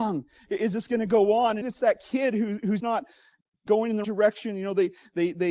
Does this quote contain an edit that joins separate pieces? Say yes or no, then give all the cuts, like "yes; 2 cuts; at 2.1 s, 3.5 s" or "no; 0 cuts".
yes; 3 cuts; at 1.6 s, 2.8 s, 4.0 s